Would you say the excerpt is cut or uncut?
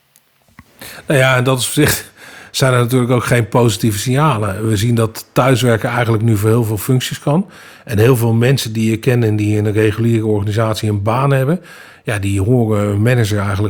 uncut